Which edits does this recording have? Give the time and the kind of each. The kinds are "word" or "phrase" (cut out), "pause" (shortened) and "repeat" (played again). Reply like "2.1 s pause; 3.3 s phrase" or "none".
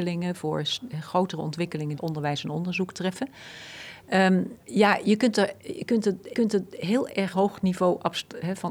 2.0 s phrase; 4.6 s pause; 6.3 s repeat; 7.3 s phrase